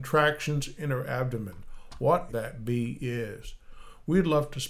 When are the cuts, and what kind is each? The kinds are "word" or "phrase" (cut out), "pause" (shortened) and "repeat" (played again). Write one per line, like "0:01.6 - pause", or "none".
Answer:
0:02.3 - phrase